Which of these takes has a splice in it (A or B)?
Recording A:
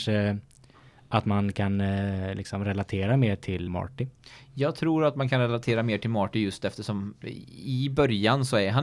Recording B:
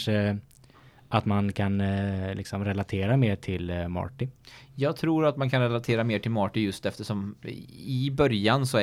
A